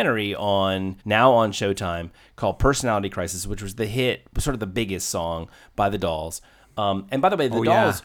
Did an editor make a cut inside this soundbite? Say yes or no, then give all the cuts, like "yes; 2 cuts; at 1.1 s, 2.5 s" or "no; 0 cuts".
yes; 1 cut; at 1.0 s